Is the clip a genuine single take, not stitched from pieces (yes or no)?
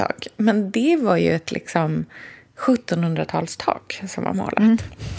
yes